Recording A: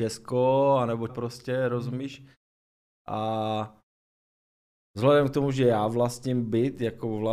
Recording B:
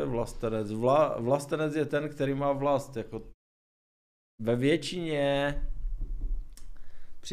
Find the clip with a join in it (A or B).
A